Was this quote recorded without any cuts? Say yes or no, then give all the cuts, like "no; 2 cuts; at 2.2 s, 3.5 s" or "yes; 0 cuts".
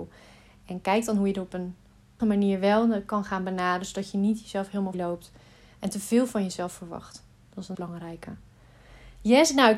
no; 3 cuts; at 2.2 s, 4.9 s, 7.7 s